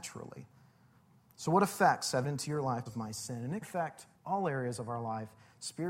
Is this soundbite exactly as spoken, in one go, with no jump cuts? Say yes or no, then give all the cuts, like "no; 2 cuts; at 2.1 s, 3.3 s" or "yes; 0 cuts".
no; 4 cuts; at 2.2 s, 2.9 s, 3.6 s, 4.1 s